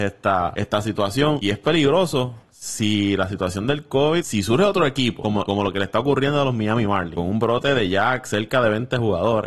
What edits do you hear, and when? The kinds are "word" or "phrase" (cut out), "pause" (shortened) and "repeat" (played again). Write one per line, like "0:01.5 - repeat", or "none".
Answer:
none